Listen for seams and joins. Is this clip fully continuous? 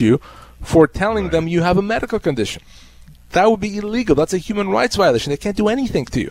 yes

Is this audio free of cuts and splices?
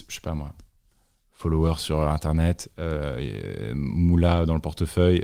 yes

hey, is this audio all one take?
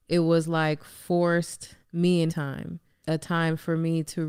no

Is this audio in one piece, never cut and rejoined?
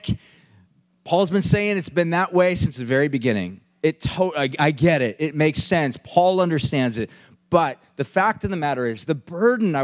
yes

